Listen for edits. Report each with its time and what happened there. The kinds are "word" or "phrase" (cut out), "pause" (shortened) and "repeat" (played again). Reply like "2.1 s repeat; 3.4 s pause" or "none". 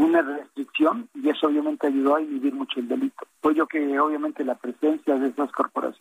3.3 s pause; 3.7 s word